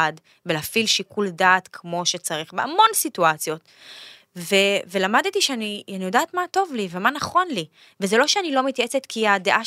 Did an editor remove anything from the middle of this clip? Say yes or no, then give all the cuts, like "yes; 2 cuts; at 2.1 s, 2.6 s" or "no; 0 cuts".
no; 0 cuts